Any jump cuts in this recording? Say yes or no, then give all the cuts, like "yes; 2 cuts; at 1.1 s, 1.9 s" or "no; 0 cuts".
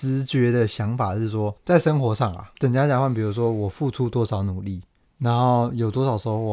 yes; 3 cuts; at 1.6 s, 2.5 s, 5.0 s